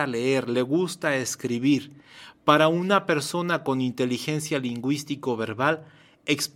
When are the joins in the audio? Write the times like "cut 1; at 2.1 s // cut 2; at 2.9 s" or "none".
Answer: none